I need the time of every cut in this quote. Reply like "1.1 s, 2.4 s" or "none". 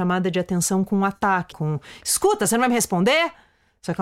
1.5 s